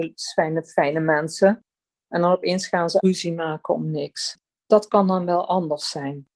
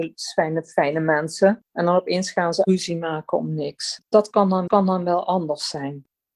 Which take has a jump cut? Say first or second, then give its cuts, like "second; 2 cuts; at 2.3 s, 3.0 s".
second; 3 cuts; at 1.6 s, 4.1 s, 4.7 s